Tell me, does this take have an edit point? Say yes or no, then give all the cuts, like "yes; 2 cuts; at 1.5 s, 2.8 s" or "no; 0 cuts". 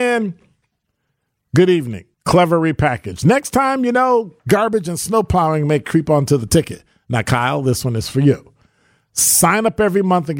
yes; 2 cuts; at 2.1 s, 4.4 s